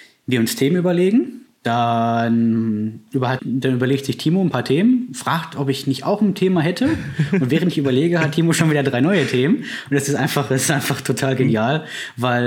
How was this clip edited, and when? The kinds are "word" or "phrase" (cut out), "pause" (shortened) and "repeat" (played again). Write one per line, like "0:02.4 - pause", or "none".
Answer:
0:03.4 - word